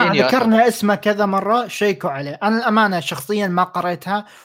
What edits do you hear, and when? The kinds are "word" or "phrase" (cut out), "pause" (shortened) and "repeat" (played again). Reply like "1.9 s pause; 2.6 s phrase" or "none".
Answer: none